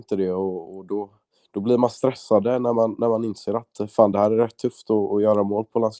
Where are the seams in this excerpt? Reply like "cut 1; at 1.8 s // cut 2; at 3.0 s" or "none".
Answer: none